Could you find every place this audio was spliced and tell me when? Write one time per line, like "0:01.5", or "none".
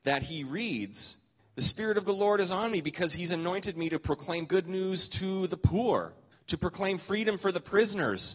0:01.4
0:06.3